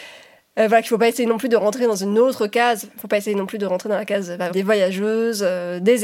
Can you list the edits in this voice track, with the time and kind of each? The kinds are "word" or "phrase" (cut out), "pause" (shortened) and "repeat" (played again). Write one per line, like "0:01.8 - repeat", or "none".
0:04.5 - word